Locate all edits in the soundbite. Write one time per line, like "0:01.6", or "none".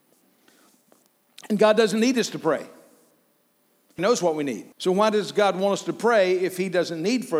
0:04.0
0:04.7